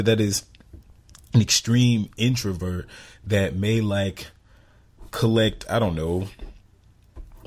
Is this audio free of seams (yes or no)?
yes